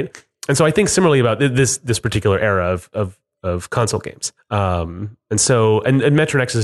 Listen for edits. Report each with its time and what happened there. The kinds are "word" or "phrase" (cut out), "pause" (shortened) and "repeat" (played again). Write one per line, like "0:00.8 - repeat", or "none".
0:04.4 - pause